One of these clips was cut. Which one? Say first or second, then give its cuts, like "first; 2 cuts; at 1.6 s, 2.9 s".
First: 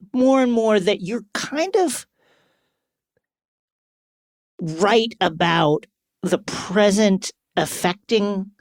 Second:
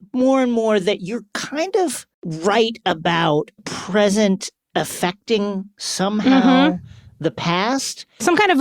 second; 2 cuts; at 2.1 s, 3.6 s